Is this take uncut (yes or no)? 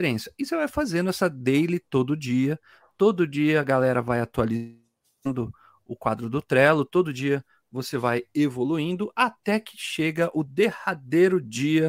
yes